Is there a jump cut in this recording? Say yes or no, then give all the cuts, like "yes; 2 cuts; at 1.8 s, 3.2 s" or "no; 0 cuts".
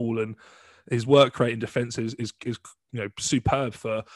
no; 0 cuts